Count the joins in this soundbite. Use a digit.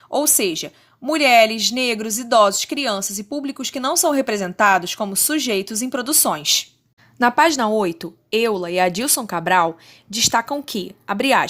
0